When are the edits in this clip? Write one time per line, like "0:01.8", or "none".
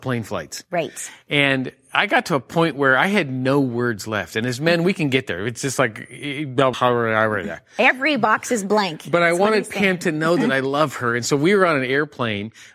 0:06.7